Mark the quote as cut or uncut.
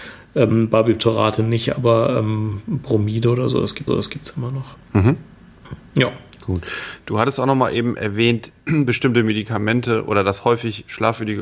cut